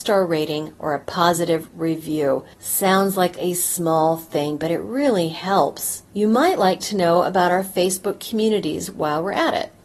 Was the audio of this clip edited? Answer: yes; 2 cuts; at 2.5 s, 6.0 s

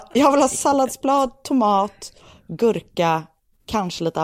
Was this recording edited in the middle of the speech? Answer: no; 0 cuts

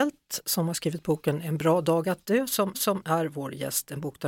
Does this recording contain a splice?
yes; 1 cut; at 2.7 s

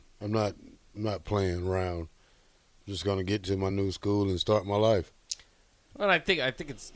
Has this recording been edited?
no; 0 cuts

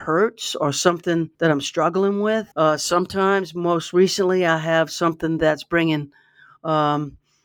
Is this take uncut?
no; 2 cuts; at 1.3 s, 2.5 s

